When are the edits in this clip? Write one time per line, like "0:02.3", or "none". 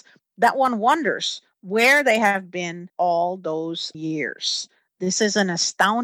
0:02.9
0:03.9